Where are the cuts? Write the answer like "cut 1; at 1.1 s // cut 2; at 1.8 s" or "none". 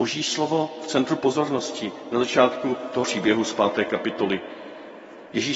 cut 1; at 3.0 s